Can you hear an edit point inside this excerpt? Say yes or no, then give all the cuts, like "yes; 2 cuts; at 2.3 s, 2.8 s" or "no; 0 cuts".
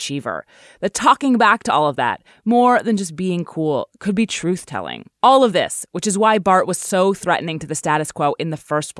yes; 1 cut; at 5.2 s